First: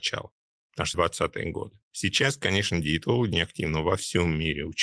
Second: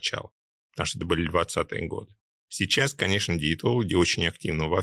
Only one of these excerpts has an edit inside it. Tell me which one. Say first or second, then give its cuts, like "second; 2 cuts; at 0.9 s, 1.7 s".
first; 3 cuts; at 0.9 s, 1.8 s, 3.3 s